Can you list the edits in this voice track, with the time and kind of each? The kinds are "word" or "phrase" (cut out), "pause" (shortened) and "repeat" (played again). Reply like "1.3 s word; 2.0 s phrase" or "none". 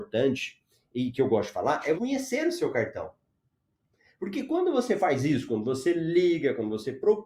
2.0 s word